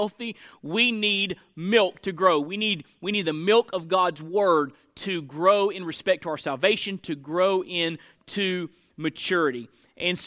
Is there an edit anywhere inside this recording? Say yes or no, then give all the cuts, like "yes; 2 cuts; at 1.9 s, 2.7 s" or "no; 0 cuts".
no; 0 cuts